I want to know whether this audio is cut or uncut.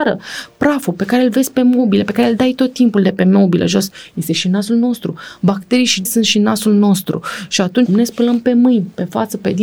cut